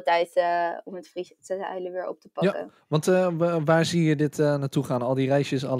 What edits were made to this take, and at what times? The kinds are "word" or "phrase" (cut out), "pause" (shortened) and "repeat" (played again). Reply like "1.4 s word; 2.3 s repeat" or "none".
none